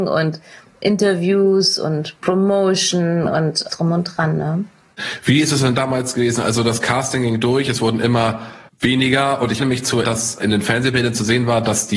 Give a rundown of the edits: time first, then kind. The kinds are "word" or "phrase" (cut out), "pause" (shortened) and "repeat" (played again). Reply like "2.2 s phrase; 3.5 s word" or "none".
3.7 s word; 8.7 s pause; 9.6 s word; 10.0 s word; 10.4 s word